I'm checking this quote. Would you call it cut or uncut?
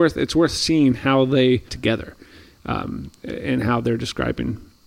cut